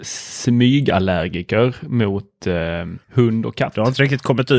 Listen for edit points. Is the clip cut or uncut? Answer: cut